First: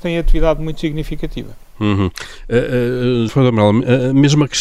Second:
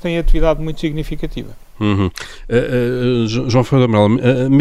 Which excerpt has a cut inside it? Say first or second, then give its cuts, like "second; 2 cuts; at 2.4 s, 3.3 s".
first; 1 cut; at 3.3 s